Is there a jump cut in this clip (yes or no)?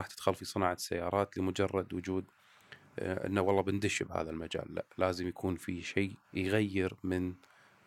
yes